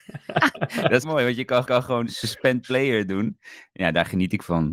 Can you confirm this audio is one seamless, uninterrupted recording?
no; 2 cuts; at 1.0 s, 1.6 s

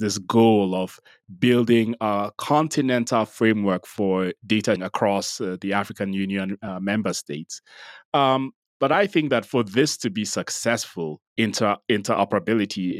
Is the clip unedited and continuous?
no; 2 cuts; at 4.8 s, 11.3 s

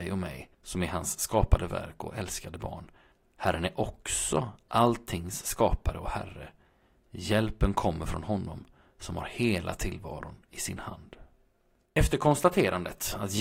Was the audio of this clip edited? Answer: no; 0 cuts

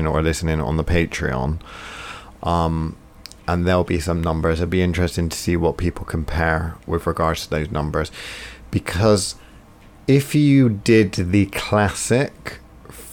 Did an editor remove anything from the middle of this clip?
no; 0 cuts

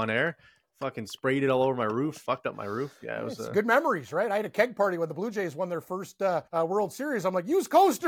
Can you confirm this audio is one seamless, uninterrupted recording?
no; 1 cut; at 6.5 s

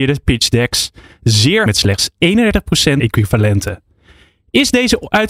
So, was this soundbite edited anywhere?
yes; 2 cuts; at 1.7 s, 3.0 s

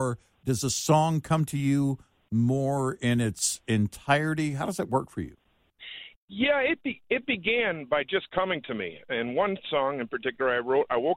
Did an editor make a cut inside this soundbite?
no; 0 cuts

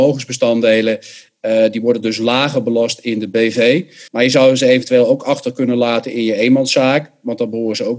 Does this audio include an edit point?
yes; 1 cut; at 4.1 s

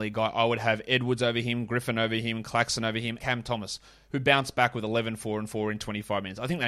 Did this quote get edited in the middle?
yes; 1 cut; at 3.2 s

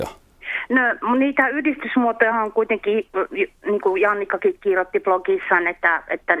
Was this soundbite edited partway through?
no; 0 cuts

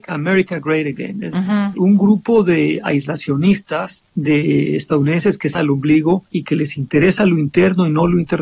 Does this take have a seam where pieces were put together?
yes; 2 cuts; at 1.3 s, 5.5 s

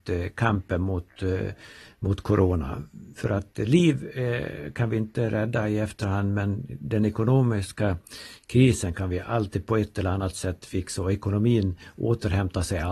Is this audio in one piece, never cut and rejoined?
yes; 0 cuts

